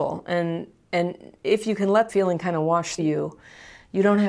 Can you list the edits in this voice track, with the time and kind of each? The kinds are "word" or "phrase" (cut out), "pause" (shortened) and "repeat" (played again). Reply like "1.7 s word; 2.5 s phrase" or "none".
2.1 s word; 3.0 s word